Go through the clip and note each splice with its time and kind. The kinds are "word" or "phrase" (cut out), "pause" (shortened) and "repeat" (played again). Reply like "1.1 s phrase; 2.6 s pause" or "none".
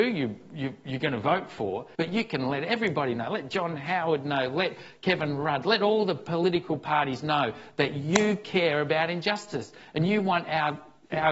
1.9 s pause